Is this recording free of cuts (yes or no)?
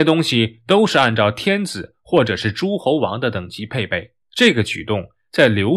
no